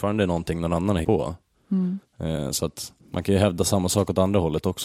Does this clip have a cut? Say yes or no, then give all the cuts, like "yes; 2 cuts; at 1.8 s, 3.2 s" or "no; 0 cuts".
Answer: yes; 2 cuts; at 1.0 s, 3.0 s